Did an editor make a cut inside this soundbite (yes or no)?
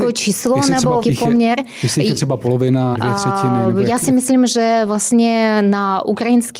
yes